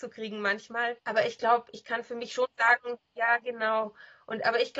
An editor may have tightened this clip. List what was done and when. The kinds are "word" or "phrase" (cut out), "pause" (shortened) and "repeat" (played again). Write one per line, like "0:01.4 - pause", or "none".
0:01.0 - pause
0:03.0 - pause